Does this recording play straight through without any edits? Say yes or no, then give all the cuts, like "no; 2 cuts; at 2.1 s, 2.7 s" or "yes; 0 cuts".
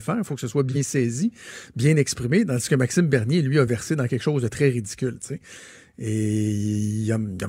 yes; 0 cuts